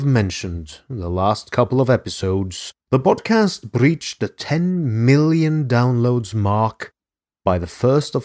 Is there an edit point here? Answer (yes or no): yes